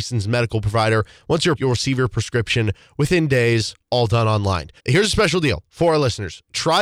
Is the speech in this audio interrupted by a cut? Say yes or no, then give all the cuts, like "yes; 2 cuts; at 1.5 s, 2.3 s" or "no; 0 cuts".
yes; 2 cuts; at 1.6 s, 4.8 s